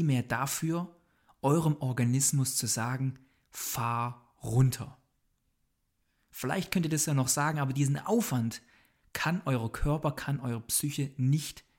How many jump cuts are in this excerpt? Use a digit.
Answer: 0